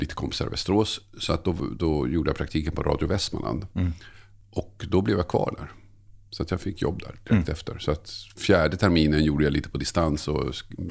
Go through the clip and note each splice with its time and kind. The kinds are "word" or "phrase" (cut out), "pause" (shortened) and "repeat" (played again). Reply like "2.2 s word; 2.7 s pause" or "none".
none